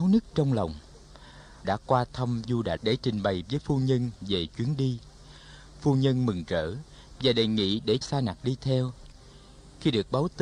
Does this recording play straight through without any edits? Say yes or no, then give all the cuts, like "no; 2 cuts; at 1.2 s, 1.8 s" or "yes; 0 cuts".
no; 4 cuts; at 1.6 s, 2.4 s, 2.8 s, 8.0 s